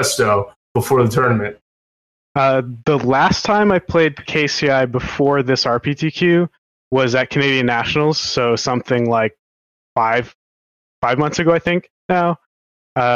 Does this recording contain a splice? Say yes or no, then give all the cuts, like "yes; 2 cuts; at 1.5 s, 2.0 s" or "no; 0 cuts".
no; 0 cuts